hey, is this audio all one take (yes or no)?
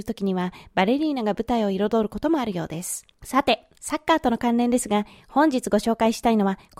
no